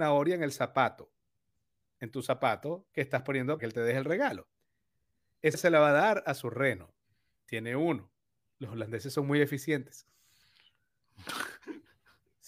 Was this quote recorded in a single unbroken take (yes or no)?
no